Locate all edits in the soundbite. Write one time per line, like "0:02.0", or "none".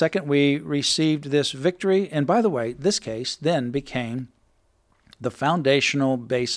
none